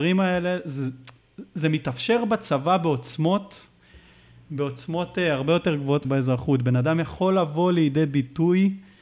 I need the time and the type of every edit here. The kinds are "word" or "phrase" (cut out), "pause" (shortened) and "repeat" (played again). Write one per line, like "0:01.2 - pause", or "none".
0:06.0 - word